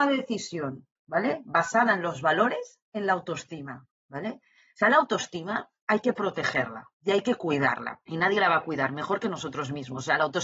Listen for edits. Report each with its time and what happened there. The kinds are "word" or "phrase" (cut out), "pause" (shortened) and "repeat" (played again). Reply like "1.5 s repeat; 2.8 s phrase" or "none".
none